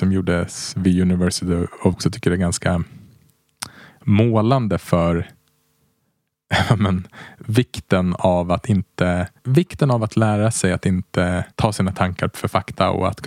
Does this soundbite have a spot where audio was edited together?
yes; 3 cuts; at 1.9 s, 9.4 s, 11.5 s

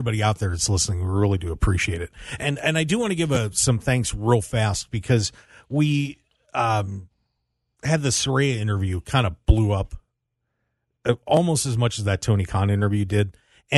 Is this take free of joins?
yes; 0 cuts

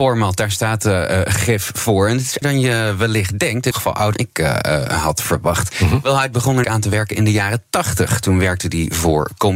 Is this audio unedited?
no; 4 cuts; at 2.4 s, 3.7 s, 4.1 s, 6.6 s

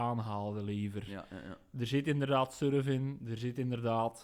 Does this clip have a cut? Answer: no; 0 cuts

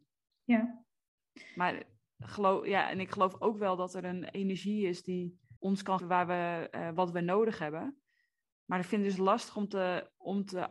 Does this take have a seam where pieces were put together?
yes; 2 cuts; at 5.6 s, 6.0 s

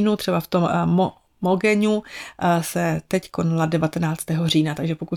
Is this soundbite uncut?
yes; 0 cuts

